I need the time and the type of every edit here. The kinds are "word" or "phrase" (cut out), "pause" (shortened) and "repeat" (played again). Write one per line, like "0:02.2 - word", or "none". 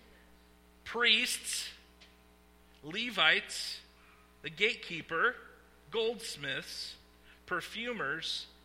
0:07.4 - word